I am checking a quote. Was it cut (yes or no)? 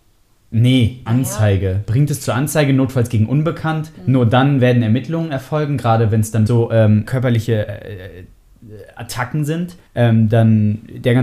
yes